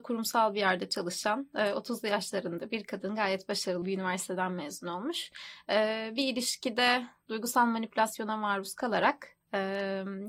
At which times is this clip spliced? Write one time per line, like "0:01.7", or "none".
0:03.8